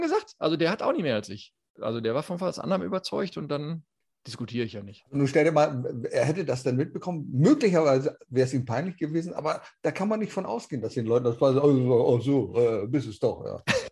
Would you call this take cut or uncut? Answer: uncut